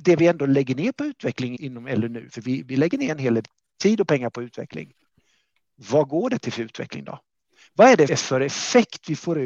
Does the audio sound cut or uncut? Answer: cut